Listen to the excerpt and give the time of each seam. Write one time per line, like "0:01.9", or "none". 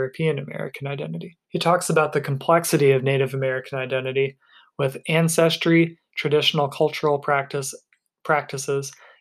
0:01.4